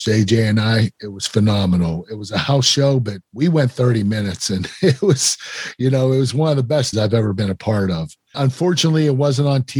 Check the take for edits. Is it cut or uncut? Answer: cut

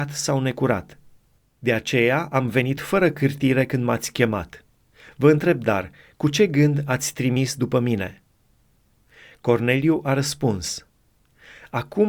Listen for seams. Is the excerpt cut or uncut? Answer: uncut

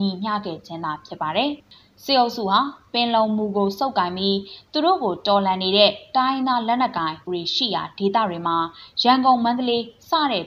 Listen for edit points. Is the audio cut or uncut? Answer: cut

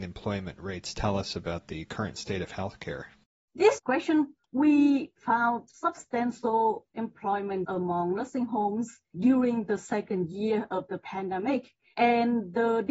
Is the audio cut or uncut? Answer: cut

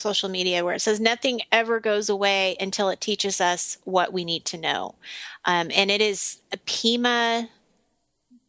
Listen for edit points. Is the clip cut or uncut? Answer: uncut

